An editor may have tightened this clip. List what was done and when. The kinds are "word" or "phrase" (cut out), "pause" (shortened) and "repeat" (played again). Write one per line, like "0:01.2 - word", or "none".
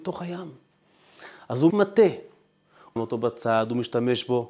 0:01.7 - word
0:03.0 - word